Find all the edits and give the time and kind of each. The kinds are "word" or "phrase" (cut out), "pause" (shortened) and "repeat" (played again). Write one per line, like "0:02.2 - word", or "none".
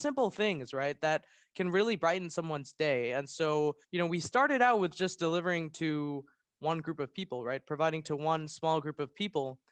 0:03.8 - pause